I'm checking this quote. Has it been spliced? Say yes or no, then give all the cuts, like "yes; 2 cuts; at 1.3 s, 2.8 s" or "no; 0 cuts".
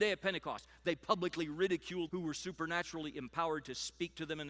yes; 1 cut; at 2.1 s